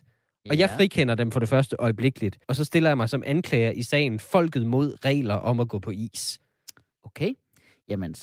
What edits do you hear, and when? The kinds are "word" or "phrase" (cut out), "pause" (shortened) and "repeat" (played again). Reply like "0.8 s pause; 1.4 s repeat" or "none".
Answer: 2.4 s pause